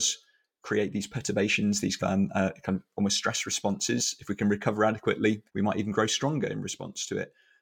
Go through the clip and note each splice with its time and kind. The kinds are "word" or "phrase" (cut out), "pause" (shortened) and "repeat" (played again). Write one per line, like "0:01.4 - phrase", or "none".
0:02.0 - phrase
0:05.5 - pause